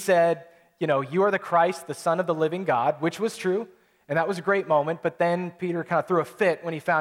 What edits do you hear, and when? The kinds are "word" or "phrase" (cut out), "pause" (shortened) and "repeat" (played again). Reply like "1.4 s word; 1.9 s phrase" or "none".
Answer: none